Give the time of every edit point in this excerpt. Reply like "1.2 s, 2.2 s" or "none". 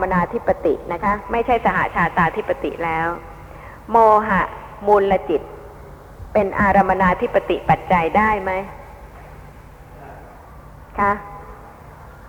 none